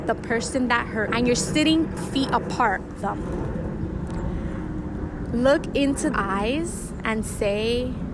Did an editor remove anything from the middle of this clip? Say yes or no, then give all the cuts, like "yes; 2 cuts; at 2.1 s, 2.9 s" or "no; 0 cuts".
yes; 4 cuts; at 1.1 s, 2.0 s, 3.0 s, 6.1 s